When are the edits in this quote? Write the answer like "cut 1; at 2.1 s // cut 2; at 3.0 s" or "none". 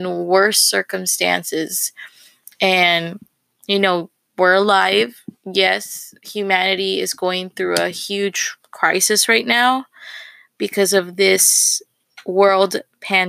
none